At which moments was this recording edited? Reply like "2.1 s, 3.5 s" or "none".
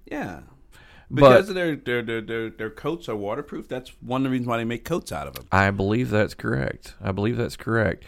none